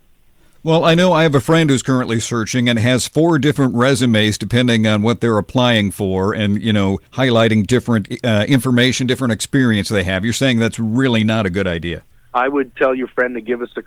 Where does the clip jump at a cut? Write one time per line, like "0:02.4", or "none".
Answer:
0:07.1
0:12.1